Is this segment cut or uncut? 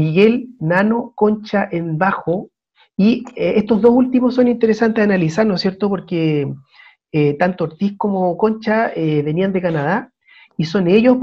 uncut